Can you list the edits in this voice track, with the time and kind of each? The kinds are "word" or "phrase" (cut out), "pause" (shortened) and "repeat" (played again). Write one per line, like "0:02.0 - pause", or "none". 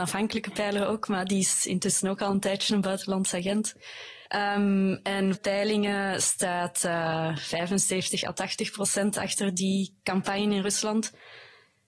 0:04.3 - pause
0:05.3 - phrase

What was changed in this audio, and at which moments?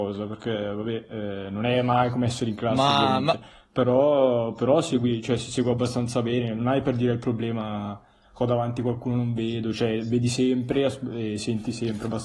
none

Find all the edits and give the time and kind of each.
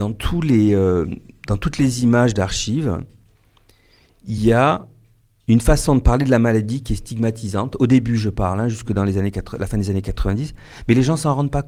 none

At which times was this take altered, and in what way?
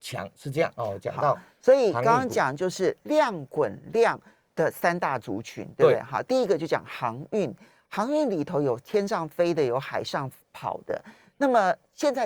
none

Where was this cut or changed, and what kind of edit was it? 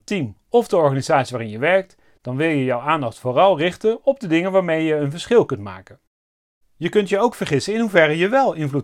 none

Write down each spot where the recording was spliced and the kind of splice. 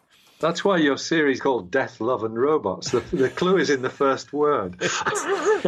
0:01.4 - word

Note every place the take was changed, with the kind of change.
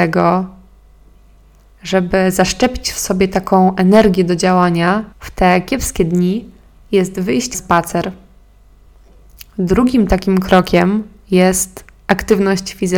0:05.1 - pause
0:07.5 - word

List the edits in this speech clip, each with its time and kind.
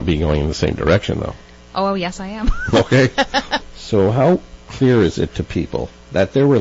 none

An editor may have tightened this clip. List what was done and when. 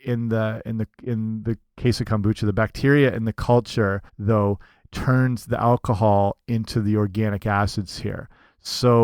0:04.1 - pause

